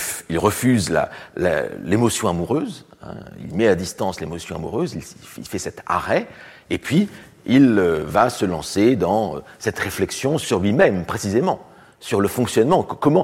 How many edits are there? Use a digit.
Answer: 0